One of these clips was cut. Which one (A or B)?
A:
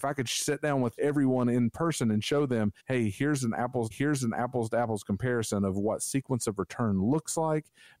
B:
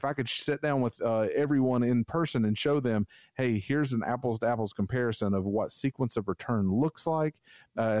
A